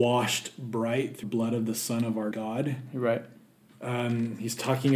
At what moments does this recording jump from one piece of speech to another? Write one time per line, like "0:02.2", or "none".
0:01.2
0:02.3